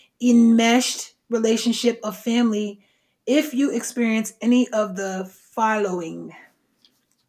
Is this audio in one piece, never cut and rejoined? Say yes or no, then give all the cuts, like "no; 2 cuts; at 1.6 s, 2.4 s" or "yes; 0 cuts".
yes; 0 cuts